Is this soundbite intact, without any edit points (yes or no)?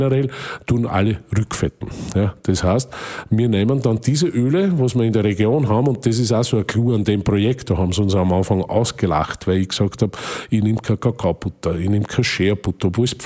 yes